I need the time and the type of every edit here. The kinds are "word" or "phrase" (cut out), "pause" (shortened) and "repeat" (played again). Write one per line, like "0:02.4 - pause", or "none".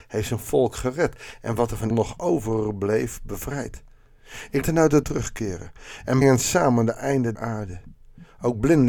0:01.9 - word
0:04.6 - word
0:05.0 - word
0:06.2 - word
0:07.4 - word